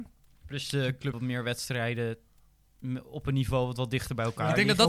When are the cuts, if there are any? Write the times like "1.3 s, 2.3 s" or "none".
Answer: 1.1 s